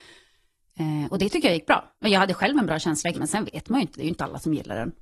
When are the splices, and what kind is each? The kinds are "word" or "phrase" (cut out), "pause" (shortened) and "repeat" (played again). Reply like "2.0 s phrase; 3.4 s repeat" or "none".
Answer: 1.9 s pause; 3.1 s word